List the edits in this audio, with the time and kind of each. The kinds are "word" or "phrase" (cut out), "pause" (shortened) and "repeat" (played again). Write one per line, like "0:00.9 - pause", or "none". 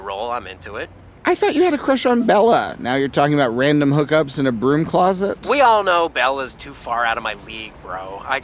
none